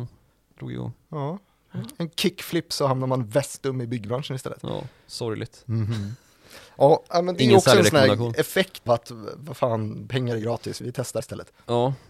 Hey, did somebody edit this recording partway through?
yes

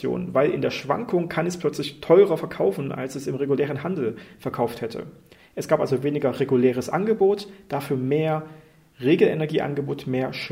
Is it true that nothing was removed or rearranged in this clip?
yes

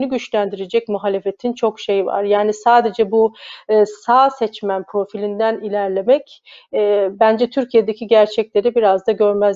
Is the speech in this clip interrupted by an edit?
no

